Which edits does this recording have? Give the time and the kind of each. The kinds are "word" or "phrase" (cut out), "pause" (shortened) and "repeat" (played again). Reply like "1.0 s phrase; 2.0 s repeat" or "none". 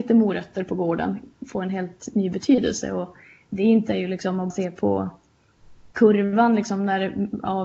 3.9 s word; 4.5 s word